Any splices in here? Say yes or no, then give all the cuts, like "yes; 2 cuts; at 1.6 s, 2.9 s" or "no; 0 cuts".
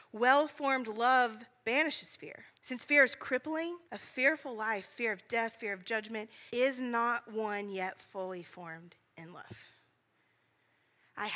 yes; 3 cuts; at 2.5 s, 3.8 s, 6.5 s